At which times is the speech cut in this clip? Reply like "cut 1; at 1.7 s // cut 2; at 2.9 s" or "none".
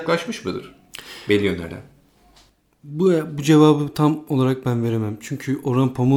none